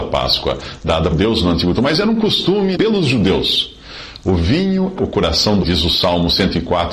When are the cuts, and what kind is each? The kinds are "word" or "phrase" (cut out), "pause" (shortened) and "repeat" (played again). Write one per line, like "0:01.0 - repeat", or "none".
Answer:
0:01.1 - word
0:01.7 - word
0:02.7 - word
0:05.0 - word
0:05.6 - word